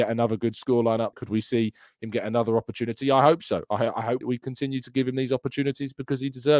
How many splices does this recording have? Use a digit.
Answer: 2